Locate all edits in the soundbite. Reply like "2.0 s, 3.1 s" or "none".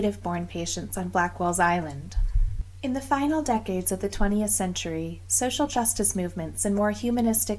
none